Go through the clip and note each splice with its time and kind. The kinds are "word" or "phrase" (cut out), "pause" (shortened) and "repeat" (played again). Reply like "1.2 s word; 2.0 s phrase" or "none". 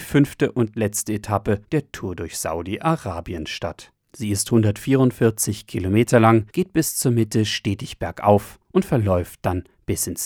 1.6 s pause; 4.0 s pause; 6.5 s pause; 8.6 s pause